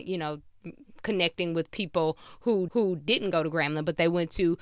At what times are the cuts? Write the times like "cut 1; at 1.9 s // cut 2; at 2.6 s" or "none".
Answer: cut 1; at 2.7 s